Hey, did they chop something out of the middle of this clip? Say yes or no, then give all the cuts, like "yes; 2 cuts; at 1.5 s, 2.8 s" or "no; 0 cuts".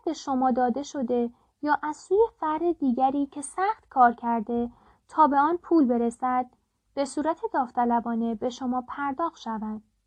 no; 0 cuts